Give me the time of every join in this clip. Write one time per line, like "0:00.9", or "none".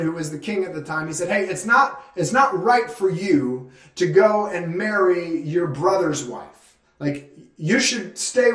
none